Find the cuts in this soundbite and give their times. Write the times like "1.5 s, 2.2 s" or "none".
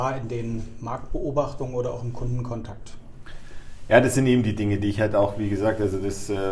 none